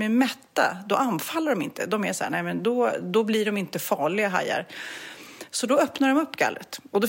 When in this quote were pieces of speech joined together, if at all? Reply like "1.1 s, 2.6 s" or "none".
none